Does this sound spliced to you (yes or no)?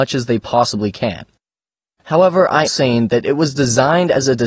yes